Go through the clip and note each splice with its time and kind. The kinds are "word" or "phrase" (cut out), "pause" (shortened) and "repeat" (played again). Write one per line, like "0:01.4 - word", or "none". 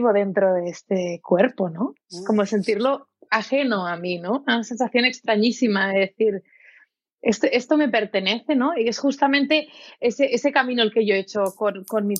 none